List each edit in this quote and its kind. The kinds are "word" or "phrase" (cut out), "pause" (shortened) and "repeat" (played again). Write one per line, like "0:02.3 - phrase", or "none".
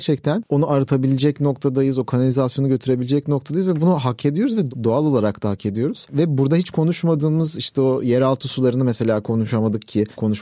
none